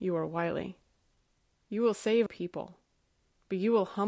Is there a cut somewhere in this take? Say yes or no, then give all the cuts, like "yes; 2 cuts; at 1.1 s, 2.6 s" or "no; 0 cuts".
yes; 1 cut; at 2.3 s